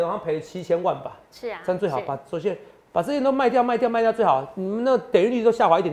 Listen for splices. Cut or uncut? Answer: uncut